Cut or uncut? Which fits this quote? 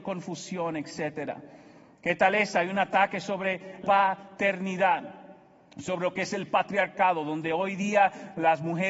cut